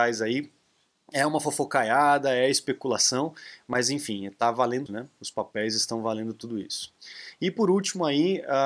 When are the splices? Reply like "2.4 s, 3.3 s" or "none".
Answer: 4.9 s